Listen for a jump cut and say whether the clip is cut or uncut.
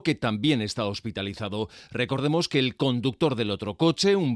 uncut